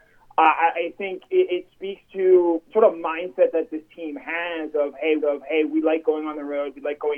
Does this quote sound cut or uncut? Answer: cut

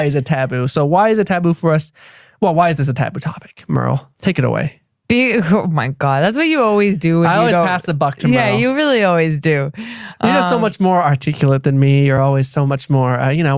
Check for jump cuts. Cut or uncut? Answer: uncut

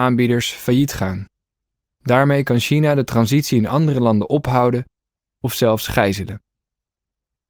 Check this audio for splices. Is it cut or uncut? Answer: uncut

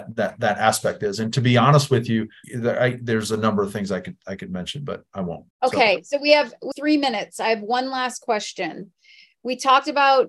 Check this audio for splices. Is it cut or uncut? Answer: cut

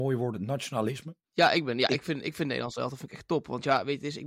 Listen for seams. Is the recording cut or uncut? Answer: cut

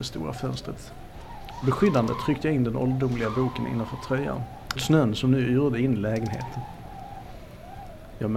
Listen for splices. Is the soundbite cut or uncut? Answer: cut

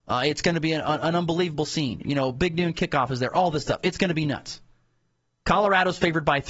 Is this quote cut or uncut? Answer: uncut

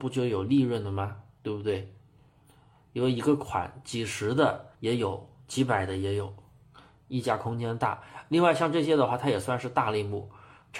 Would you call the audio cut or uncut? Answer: cut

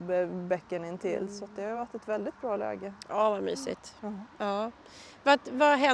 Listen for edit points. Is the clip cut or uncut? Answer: uncut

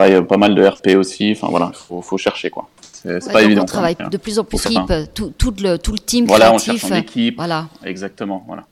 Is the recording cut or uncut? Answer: cut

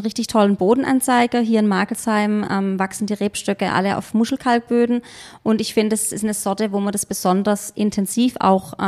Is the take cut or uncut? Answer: uncut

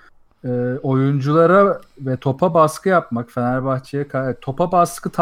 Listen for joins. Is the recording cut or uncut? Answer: uncut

